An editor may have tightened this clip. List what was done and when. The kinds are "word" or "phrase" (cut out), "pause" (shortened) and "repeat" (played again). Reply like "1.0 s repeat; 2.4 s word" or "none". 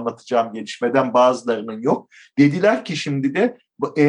none